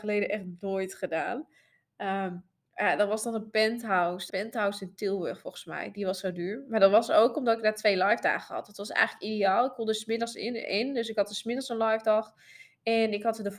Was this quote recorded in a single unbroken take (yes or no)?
no